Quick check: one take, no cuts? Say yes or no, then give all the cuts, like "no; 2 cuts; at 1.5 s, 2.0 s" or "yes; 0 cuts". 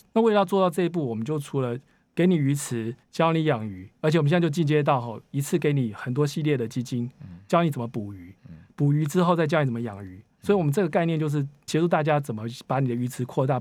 no; 3 cuts; at 2.0 s, 3.0 s, 11.7 s